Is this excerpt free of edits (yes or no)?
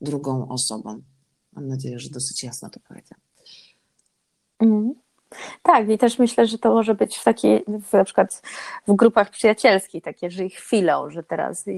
yes